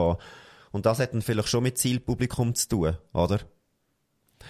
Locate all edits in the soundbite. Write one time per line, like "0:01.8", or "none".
none